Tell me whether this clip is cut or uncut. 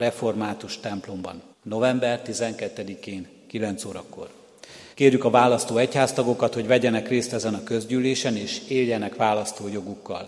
cut